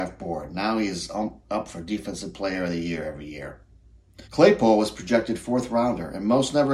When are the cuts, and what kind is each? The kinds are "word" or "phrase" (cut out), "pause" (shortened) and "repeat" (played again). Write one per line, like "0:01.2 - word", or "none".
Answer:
0:04.2 - pause

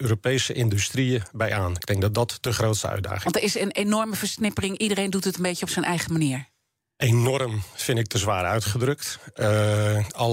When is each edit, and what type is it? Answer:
none

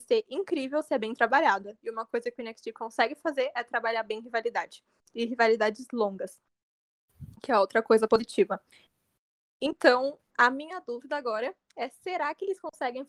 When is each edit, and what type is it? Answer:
0:10.3 - pause

